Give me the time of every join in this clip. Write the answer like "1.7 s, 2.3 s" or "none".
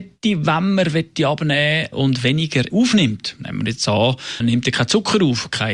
1.9 s, 2.7 s, 4.4 s

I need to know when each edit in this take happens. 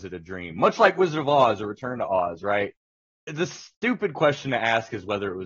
3.0 s

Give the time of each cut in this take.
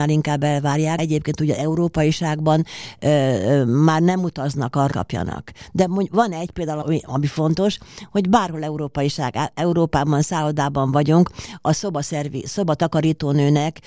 1.0 s, 4.9 s, 6.8 s

